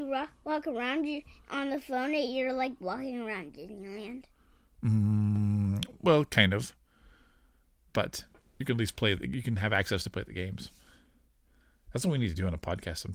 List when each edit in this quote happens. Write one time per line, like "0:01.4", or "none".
none